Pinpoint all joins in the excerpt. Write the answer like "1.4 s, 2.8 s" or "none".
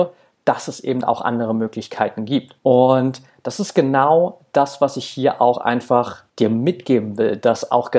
2.6 s, 6.3 s